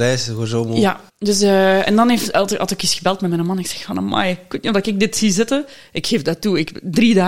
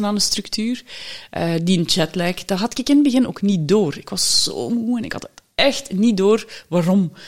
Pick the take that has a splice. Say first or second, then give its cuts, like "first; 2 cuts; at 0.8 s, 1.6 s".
first; 2 cuts; at 1.1 s, 2.3 s